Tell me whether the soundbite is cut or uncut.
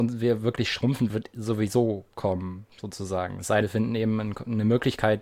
cut